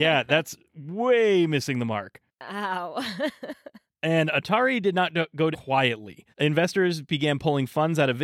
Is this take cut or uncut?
cut